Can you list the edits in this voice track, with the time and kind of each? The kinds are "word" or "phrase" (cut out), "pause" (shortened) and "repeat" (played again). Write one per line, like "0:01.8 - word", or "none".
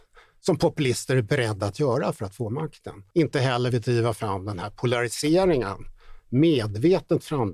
0:03.1 - pause
0:03.7 - word